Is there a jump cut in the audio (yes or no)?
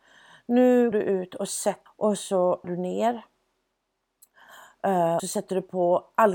yes